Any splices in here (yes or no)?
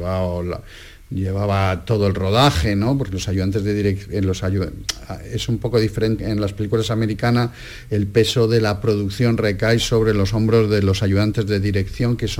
yes